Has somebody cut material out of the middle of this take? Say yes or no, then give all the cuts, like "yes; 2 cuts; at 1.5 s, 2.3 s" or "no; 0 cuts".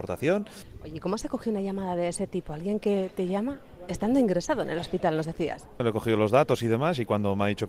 no; 0 cuts